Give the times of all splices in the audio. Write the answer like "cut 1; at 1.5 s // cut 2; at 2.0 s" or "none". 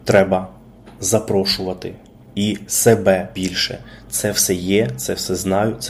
cut 1; at 2.2 s // cut 2; at 3.3 s